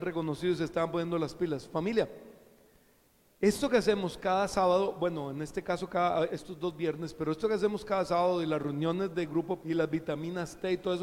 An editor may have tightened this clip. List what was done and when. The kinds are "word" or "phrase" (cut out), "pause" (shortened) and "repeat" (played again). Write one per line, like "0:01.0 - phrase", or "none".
0:06.3 - word
0:09.6 - word